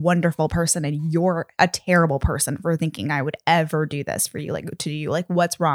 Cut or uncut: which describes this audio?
uncut